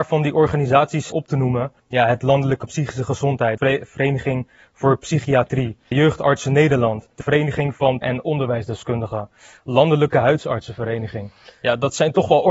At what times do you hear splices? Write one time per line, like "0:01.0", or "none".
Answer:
0:01.1
0:01.8
0:02.2
0:02.7
0:03.6
0:05.9
0:07.2
0:08.0